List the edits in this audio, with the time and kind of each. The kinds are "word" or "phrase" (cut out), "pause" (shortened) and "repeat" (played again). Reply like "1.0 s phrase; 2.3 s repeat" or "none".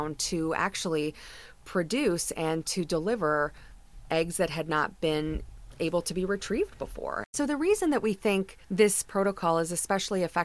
8.6 s pause